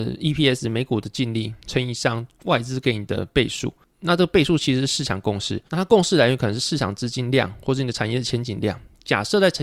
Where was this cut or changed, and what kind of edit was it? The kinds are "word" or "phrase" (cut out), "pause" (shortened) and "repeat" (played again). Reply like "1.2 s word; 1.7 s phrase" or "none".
5.7 s pause